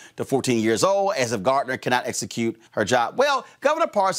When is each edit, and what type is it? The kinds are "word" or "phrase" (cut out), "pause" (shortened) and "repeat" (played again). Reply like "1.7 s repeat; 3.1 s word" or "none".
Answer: 2.7 s pause